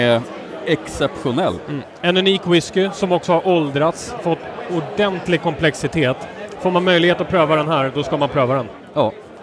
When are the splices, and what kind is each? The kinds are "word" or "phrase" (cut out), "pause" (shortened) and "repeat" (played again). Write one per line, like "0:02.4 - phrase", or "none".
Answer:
none